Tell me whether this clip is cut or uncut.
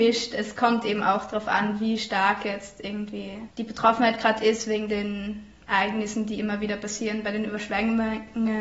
cut